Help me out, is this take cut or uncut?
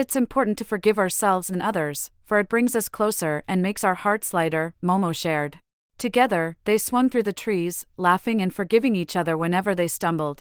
cut